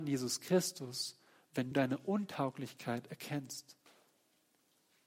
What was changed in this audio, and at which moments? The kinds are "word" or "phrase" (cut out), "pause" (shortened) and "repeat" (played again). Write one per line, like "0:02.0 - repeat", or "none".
0:01.7 - word